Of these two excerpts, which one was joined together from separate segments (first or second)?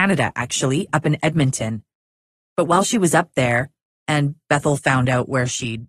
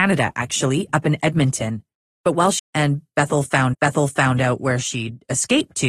second